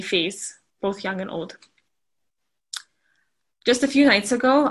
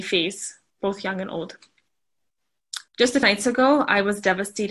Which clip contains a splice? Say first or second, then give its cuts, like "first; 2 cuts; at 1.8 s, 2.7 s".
second; 2 cuts; at 2.9 s, 3.2 s